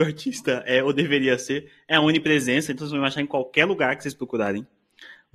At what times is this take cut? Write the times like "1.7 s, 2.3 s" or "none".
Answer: none